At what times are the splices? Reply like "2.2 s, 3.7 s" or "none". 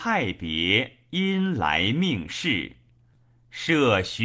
none

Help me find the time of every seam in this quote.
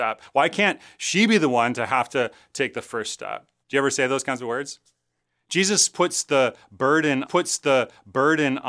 3.6 s, 5.2 s, 7.3 s

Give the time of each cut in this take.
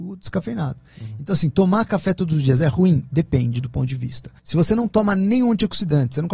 4.4 s

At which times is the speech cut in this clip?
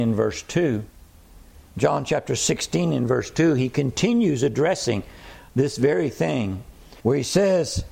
1.7 s, 7.0 s

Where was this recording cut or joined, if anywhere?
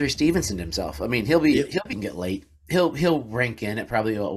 1.9 s

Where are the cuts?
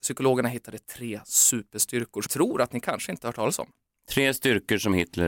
2.3 s

